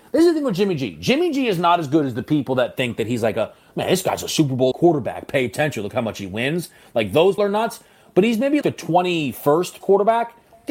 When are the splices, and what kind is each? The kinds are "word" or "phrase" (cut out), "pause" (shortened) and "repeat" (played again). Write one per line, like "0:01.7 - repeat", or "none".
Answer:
0:04.7 - word
0:07.4 - word
0:08.6 - word
0:09.8 - word